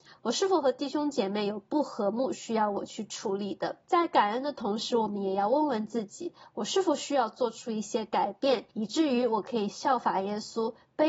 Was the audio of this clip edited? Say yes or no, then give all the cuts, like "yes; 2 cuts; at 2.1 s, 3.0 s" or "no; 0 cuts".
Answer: yes; 2 cuts; at 3.8 s, 8.7 s